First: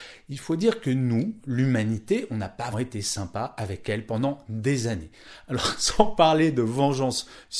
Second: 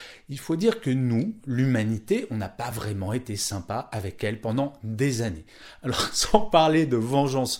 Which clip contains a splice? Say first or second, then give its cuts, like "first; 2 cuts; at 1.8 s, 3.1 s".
first; 1 cut; at 2.7 s